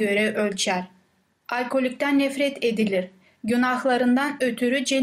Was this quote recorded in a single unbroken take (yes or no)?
yes